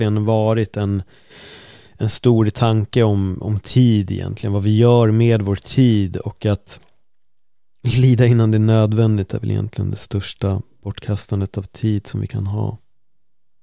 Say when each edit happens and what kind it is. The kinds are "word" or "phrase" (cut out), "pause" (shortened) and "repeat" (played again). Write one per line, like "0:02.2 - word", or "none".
none